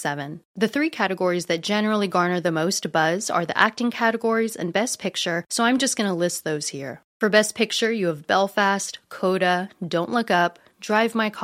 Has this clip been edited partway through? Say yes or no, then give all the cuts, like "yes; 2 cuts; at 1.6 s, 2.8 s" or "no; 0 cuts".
no; 0 cuts